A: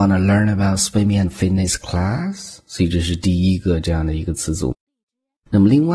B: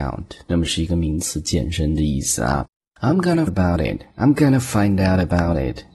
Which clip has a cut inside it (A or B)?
B